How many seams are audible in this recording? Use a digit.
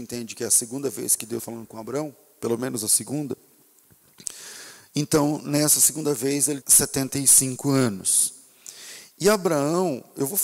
2